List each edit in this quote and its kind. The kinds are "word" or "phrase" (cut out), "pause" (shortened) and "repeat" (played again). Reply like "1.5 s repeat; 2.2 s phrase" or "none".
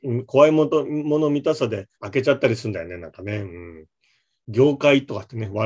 1.9 s pause